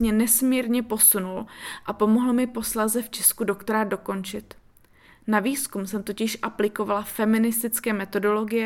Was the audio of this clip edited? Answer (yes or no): no